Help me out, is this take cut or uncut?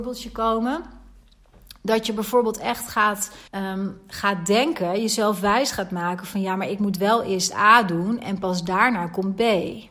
cut